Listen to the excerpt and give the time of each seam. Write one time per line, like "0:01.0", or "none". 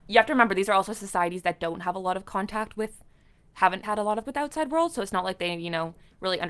0:03.8
0:04.2